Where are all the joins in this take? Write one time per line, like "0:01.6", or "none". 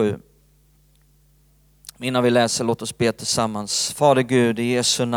none